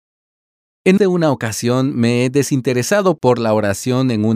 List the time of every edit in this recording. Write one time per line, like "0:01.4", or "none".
0:01.0